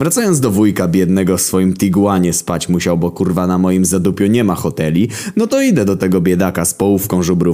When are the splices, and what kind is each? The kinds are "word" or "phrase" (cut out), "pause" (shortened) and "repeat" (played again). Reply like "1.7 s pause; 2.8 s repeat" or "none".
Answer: none